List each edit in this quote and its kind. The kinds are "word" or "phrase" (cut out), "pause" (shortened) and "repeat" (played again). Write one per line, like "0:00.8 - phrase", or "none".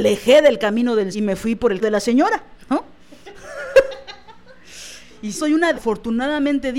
0:01.1 - word
0:01.8 - word
0:05.3 - word
0:05.7 - word